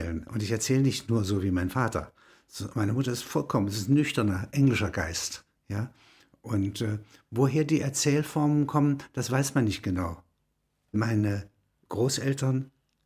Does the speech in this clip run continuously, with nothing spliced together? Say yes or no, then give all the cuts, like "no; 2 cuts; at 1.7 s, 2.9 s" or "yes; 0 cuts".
yes; 0 cuts